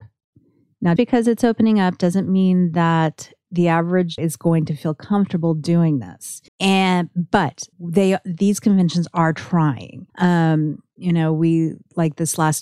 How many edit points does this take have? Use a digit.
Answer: 5